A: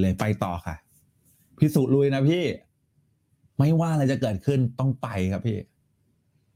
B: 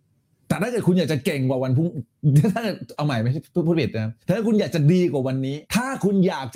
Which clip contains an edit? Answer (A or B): B